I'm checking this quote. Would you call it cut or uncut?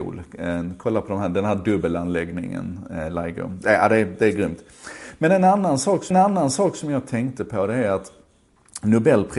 cut